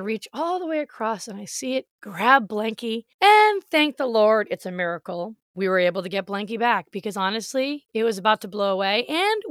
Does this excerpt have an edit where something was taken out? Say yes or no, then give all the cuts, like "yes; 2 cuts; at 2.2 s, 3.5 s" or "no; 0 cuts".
yes; 3 cuts; at 1.9 s, 3.1 s, 5.4 s